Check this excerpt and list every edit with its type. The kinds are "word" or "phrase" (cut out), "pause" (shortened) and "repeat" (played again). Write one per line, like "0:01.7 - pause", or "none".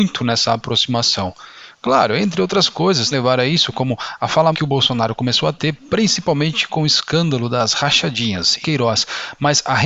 0:03.1 - word
0:04.5 - word
0:08.6 - phrase